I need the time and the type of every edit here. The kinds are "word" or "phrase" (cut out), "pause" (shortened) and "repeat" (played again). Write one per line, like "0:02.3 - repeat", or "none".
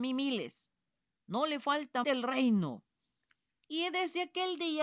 0:02.0 - phrase